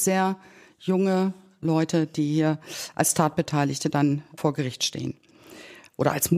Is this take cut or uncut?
uncut